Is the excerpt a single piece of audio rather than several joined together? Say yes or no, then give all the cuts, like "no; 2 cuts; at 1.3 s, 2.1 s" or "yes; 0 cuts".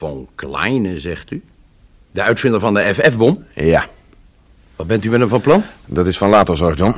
yes; 0 cuts